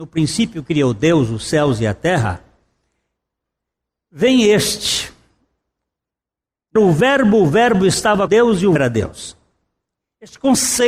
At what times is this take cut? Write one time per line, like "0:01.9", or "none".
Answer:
0:06.8
0:08.3
0:08.8

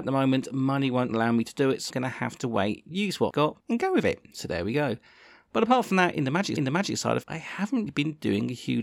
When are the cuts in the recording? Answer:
0:01.9
0:03.3
0:03.6
0:06.6
0:07.2
0:07.9

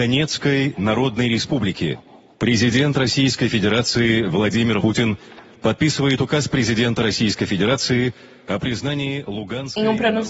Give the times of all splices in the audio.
0:04.8

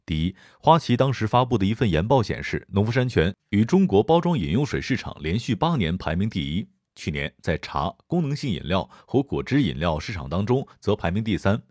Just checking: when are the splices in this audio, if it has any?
0:03.4

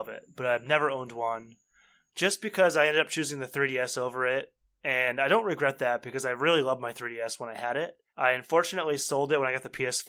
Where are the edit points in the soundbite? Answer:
0:08.1

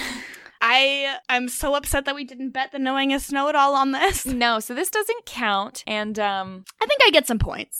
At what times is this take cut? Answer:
none

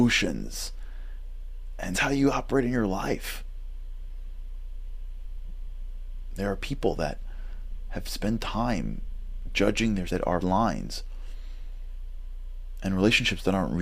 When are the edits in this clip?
0:01.9
0:10.1
0:10.4

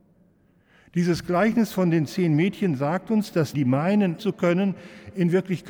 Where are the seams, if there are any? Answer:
0:03.5
0:04.2

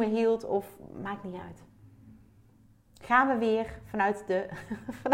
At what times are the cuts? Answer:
0:02.6

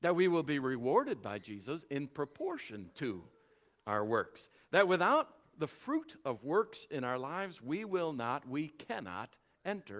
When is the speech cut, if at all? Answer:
none

